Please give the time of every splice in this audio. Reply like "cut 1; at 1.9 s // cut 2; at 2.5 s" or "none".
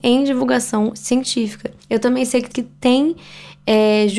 cut 1; at 2.5 s